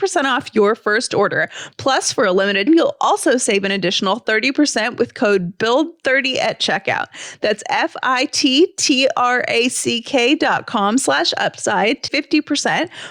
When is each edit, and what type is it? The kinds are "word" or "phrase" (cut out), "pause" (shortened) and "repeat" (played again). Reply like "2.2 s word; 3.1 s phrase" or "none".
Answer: 2.7 s word; 12.1 s word